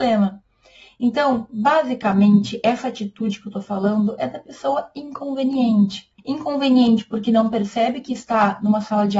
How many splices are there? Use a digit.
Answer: 1